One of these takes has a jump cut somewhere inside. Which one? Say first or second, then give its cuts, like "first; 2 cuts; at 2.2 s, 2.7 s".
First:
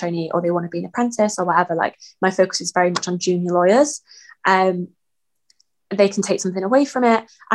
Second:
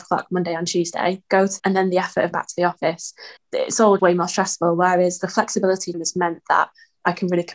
second; 6 cuts; at 1.3 s, 1.6 s, 2.3 s, 3.4 s, 4.0 s, 5.9 s